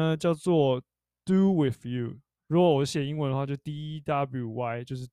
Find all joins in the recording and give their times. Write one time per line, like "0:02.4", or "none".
0:02.4